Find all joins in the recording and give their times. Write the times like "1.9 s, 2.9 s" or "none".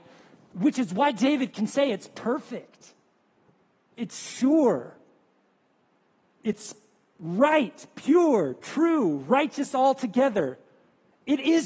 none